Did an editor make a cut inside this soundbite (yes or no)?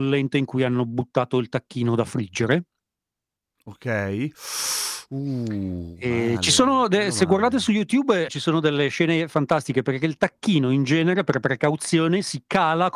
yes